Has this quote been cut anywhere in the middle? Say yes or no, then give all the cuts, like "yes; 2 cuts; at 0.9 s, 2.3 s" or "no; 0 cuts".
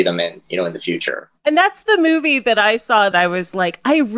yes; 1 cut; at 3.1 s